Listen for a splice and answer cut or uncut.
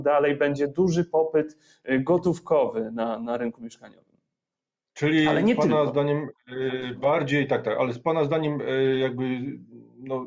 uncut